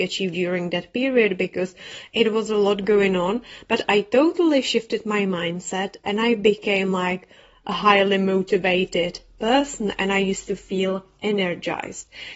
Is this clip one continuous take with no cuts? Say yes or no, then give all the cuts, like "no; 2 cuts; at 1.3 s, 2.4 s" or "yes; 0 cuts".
yes; 0 cuts